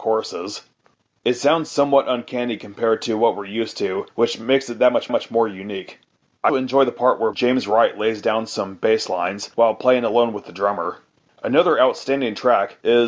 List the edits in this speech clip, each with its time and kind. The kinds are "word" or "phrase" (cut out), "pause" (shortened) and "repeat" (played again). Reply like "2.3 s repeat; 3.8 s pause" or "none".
4.1 s pause; 5.1 s repeat; 6.5 s word; 7.3 s word; 11.3 s pause